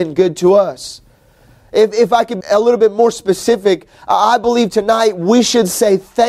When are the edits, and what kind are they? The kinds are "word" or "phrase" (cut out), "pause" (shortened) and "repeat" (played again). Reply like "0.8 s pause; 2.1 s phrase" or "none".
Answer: 2.4 s word